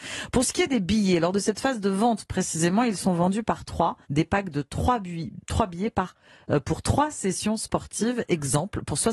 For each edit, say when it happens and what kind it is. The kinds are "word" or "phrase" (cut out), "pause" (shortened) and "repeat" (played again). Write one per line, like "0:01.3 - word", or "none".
0:04.0 - pause